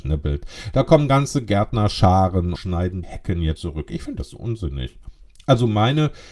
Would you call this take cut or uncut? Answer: cut